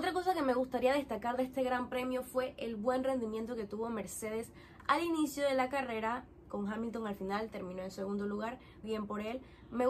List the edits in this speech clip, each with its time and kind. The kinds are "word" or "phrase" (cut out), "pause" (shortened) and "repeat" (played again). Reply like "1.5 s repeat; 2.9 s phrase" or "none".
8.8 s word